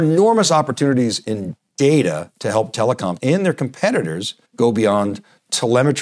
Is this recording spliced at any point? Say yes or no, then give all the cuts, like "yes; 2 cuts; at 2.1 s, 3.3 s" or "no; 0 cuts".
yes; 2 cuts; at 3.2 s, 4.4 s